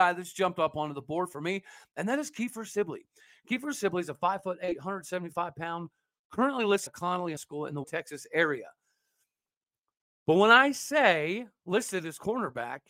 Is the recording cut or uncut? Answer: cut